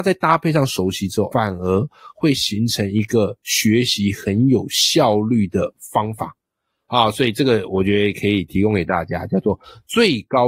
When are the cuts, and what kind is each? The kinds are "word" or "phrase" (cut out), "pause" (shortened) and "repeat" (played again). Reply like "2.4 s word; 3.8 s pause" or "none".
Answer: 1.3 s word

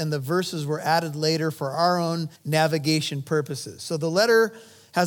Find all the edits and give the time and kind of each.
2.3 s pause

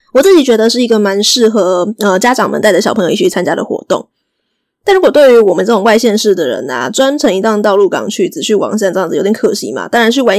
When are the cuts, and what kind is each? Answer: none

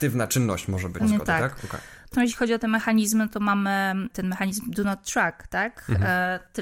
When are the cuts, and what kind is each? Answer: 1.0 s word; 2.1 s word; 4.1 s word

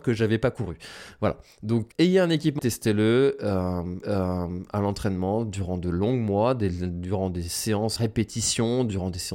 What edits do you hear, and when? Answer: 1.9 s word; 2.6 s word; 4.0 s repeat; 8.0 s word

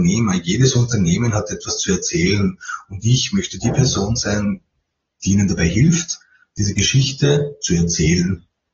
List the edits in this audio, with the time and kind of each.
none

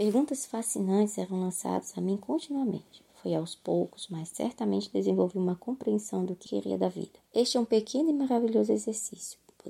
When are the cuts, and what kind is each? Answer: 6.5 s word; 7.3 s pause

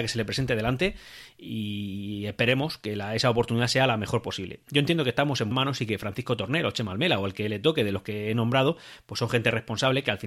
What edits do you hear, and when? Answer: 5.5 s word

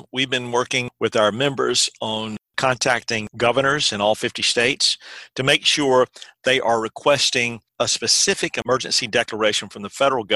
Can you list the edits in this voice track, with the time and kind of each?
7.7 s pause

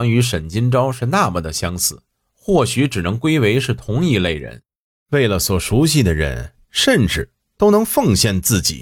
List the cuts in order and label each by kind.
none

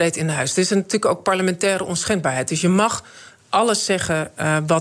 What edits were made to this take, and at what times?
none

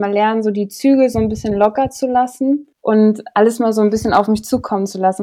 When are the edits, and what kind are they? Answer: 2.7 s pause

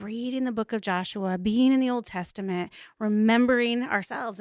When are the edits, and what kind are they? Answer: none

